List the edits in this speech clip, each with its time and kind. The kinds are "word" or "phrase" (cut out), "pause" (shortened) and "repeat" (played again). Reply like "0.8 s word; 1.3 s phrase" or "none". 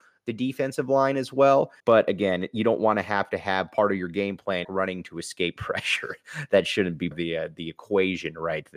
1.8 s pause; 4.6 s phrase; 7.1 s word